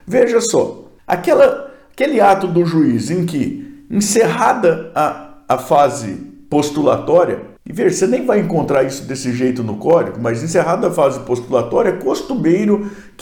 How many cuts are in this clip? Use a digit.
2